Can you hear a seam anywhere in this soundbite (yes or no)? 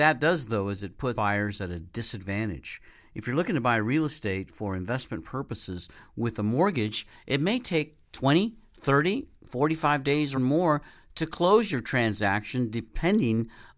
yes